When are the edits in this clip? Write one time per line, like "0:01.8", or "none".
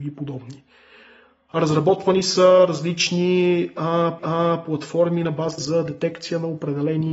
0:04.2
0:05.6